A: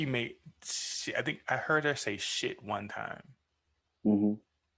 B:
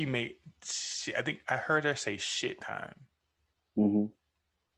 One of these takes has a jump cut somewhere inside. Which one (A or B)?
B